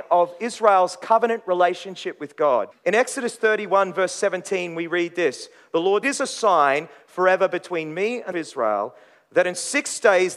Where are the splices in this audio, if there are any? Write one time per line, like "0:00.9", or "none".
0:02.7
0:06.0
0:08.3